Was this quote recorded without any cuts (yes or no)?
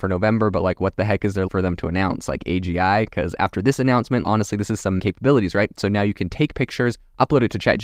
no